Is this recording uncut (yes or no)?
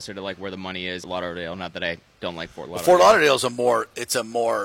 no